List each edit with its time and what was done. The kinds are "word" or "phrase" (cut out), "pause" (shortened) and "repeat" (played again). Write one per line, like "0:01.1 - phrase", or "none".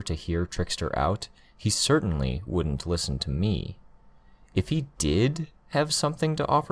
none

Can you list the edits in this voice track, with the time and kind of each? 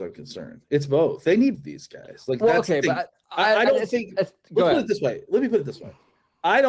0:01.5 - word

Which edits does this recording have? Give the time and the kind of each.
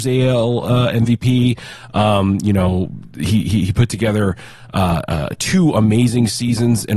none

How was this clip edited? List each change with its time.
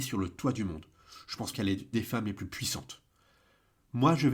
0:01.5 - word
0:01.9 - word

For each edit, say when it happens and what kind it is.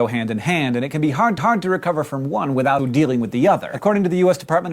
0:01.4 - repeat
0:02.8 - word

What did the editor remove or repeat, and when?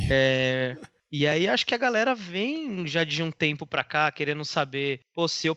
none

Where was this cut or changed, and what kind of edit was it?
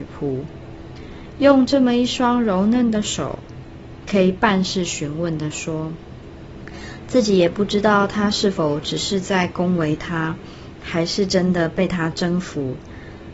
none

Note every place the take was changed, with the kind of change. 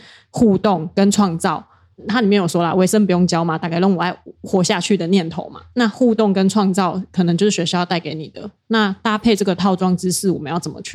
none

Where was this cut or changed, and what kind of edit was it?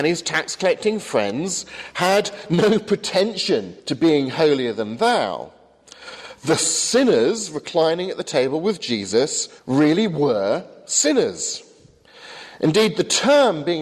0:03.8 - pause
0:09.6 - pause

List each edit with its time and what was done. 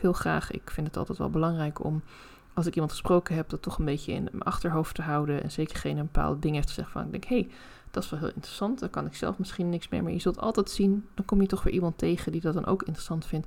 0:05.7 - word

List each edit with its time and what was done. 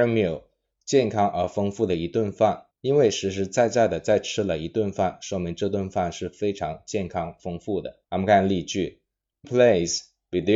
0:02.7 - pause
0:08.0 - pause
0:09.4 - word

